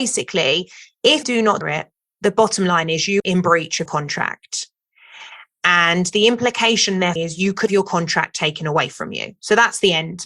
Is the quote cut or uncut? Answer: cut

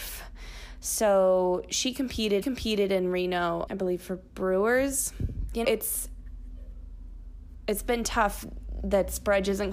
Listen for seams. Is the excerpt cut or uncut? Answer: cut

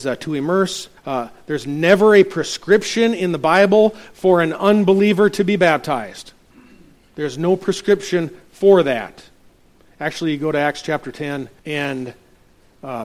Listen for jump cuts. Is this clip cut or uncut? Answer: cut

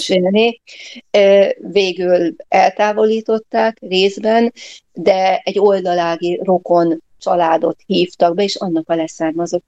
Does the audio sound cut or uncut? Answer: cut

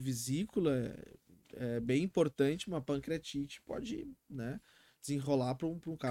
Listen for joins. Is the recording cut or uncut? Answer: uncut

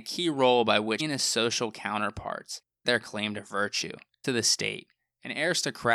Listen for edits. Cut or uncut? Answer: cut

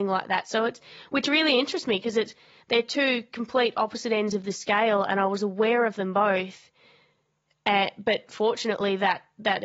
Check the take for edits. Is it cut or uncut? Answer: uncut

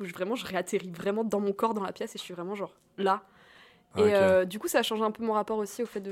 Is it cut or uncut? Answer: uncut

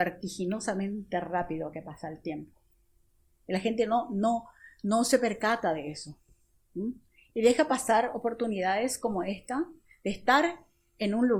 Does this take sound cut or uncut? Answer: uncut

